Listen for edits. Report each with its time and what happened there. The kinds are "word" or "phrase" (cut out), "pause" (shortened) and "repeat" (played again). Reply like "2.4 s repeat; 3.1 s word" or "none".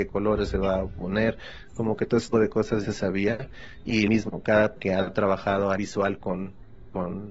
2.3 s word; 2.8 s word; 4.1 s word; 4.8 s word; 5.8 s word